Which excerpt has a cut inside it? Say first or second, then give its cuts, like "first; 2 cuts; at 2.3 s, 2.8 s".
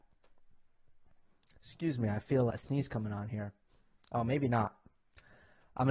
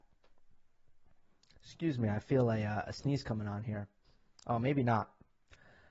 first; 1 cut; at 2.5 s